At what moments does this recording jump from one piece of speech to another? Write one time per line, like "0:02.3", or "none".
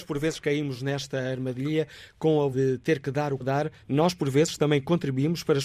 0:02.5
0:03.4
0:03.8